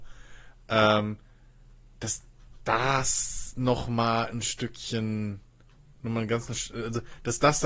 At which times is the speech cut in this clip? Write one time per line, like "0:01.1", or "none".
none